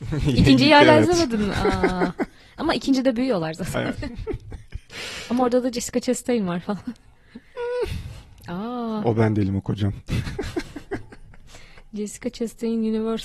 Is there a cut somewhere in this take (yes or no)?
no